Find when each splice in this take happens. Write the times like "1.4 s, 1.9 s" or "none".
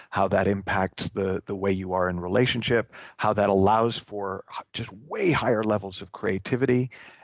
none